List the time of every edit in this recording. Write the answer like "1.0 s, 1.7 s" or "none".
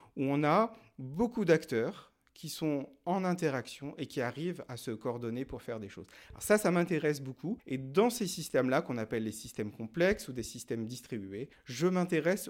none